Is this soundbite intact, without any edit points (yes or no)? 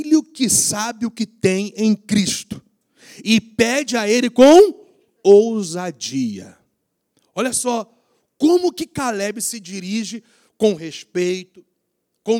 yes